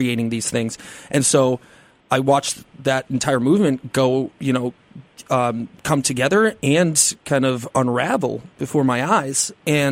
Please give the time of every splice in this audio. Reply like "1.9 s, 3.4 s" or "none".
none